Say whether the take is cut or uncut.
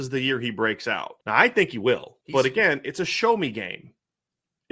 cut